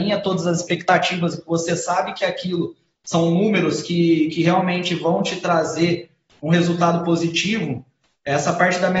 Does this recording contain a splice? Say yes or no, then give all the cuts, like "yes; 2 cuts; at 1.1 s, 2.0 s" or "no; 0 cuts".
no; 0 cuts